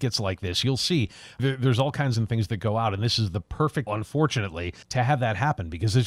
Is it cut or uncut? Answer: cut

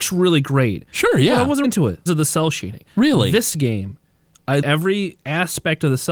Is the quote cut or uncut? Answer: cut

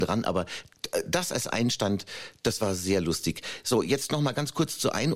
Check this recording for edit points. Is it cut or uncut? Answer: uncut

